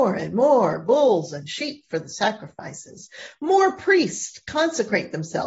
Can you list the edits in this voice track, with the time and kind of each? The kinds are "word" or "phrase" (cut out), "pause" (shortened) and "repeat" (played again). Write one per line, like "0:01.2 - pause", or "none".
none